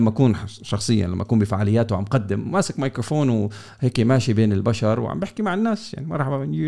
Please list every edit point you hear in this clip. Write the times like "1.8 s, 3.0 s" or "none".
none